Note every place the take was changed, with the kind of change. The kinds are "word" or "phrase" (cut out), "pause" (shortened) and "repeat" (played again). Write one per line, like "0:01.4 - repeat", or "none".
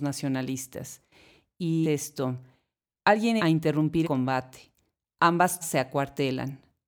0:01.8 - word
0:03.4 - word
0:04.0 - word
0:05.6 - word